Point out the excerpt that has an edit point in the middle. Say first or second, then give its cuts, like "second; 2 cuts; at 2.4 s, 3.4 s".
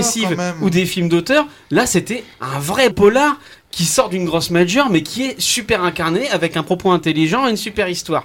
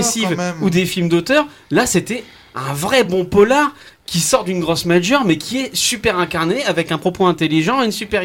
first; 2 cuts; at 2.3 s, 2.9 s